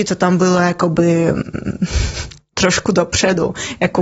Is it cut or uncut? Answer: uncut